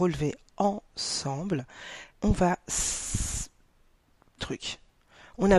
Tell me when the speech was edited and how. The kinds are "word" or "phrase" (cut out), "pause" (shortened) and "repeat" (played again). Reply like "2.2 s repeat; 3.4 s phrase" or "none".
2.1 s pause; 4.4 s phrase